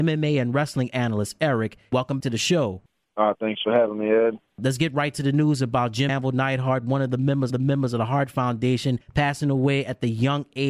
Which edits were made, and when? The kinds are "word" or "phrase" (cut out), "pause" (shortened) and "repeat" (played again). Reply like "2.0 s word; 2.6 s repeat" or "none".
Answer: 2.2 s word; 4.5 s pause; 6.1 s word; 7.5 s repeat; 9.0 s pause